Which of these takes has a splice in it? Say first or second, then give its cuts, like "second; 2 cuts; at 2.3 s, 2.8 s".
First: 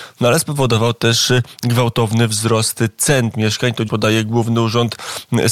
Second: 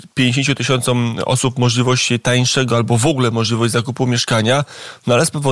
first; 2 cuts; at 3.3 s, 3.9 s